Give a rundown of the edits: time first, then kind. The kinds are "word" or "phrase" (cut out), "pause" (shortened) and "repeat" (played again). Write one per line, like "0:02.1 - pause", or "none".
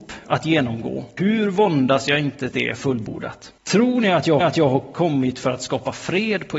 0:01.2 - word
0:02.5 - word
0:03.6 - pause
0:04.4 - repeat